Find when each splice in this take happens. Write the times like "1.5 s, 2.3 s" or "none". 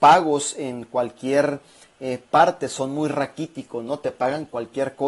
none